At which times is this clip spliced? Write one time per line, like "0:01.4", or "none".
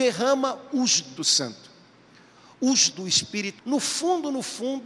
0:01.2
0:02.9
0:03.6

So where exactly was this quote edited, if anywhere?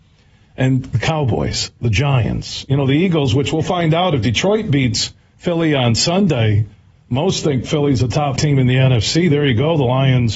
0:08.4

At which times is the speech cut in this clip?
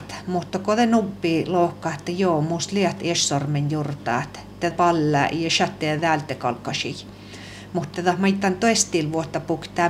0:04.7
0:06.0
0:07.9

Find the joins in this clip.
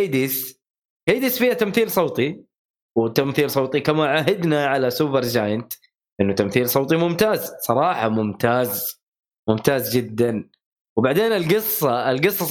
none

